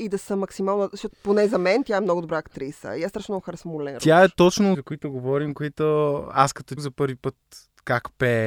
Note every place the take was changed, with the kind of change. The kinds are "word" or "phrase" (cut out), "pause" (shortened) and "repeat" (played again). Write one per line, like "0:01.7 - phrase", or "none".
0:01.1 - word
0:04.7 - phrase
0:06.8 - word